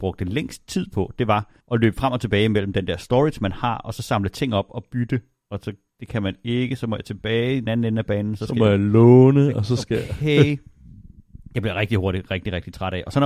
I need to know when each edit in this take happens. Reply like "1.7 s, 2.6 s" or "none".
1.6 s